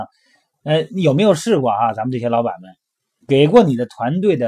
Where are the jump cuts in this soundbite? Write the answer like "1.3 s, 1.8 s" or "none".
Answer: none